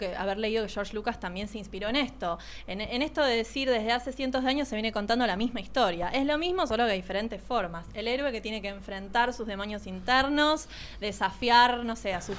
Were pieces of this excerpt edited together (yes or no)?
no